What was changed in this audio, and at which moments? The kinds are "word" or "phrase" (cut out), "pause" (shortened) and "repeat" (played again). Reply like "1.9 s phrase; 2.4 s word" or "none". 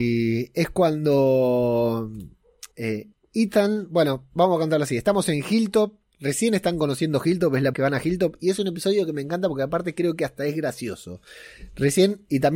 2.7 s pause; 7.7 s phrase